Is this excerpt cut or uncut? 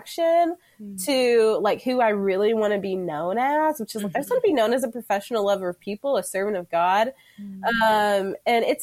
uncut